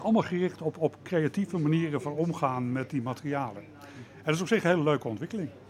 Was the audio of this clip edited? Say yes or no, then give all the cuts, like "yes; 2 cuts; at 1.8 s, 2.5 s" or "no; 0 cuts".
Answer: no; 0 cuts